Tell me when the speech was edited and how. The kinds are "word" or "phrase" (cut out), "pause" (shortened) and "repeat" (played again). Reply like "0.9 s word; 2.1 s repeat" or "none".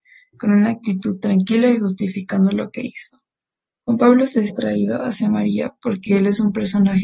4.5 s word